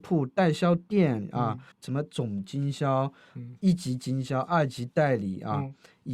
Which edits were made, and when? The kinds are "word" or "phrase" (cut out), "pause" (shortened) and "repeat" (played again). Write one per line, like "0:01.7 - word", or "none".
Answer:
0:01.7 - pause